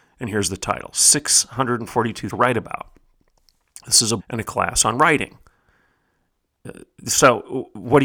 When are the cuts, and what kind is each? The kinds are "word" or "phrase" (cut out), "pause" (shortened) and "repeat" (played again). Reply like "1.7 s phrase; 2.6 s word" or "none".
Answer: 2.3 s word; 4.2 s word